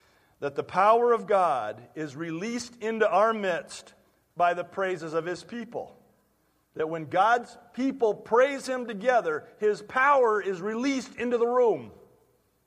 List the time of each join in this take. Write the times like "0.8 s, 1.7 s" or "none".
none